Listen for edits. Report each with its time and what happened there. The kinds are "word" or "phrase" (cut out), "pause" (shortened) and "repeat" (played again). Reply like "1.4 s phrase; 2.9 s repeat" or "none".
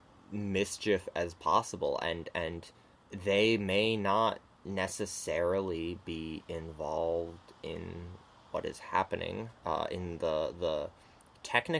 2.9 s pause; 9.6 s pause